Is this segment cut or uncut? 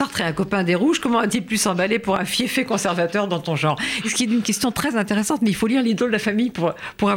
uncut